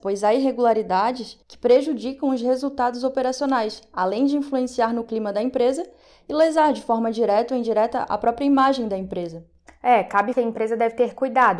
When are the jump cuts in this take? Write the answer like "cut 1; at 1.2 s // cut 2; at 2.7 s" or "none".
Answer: cut 1; at 1.4 s // cut 2; at 9.7 s // cut 3; at 10.3 s

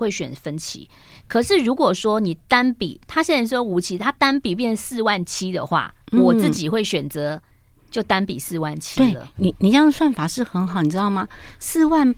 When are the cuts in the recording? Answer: cut 1; at 6.0 s

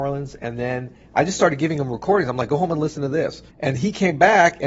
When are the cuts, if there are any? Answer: cut 1; at 3.5 s

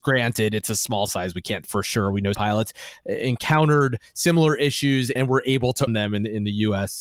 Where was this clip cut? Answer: cut 1; at 1.1 s // cut 2; at 1.6 s // cut 3; at 2.3 s // cut 4; at 5.2 s // cut 5; at 5.9 s

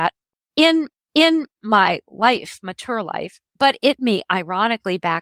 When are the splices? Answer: cut 1; at 0.9 s // cut 2; at 3.5 s // cut 3; at 4.0 s

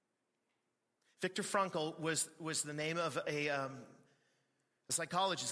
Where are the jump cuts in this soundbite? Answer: none

